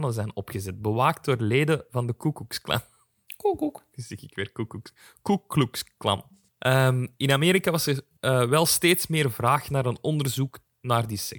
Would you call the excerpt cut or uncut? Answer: uncut